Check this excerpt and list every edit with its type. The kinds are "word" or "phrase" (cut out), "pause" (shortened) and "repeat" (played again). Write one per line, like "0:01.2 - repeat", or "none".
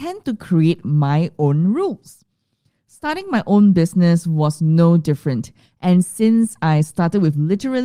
none